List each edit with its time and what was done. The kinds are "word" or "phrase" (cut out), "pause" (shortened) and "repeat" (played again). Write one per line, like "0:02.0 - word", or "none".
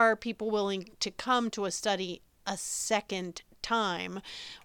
0:00.9 - pause